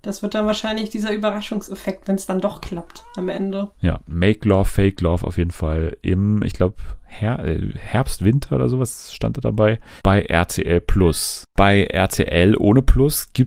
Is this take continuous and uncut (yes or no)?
no